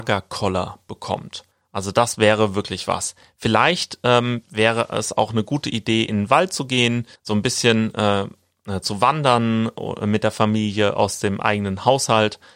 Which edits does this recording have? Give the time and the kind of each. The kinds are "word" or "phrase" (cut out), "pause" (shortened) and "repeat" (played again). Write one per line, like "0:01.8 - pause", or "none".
0:01.5 - pause
0:07.2 - pause